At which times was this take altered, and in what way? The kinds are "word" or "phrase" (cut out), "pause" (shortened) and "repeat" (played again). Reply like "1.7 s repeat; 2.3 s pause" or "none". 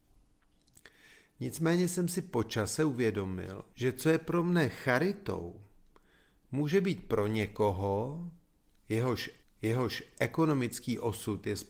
3.7 s pause; 9.4 s repeat